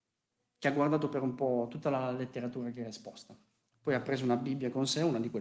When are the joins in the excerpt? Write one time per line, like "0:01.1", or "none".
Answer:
none